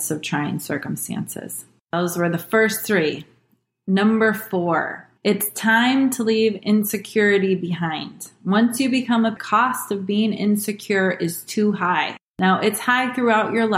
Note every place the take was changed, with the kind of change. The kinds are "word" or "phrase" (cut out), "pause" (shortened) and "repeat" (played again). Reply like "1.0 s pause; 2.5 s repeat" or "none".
1.8 s pause; 5.2 s pause; 9.4 s phrase